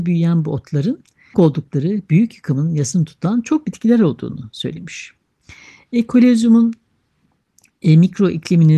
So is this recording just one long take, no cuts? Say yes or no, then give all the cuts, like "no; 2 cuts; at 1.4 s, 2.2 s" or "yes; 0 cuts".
no; 2 cuts; at 1.3 s, 3.6 s